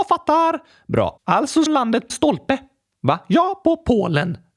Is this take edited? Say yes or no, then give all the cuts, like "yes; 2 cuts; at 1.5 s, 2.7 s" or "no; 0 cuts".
yes; 2 cuts; at 1.7 s, 2.1 s